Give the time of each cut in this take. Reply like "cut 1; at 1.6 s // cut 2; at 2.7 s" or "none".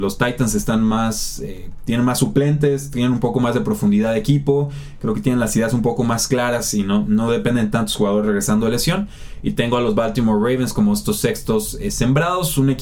none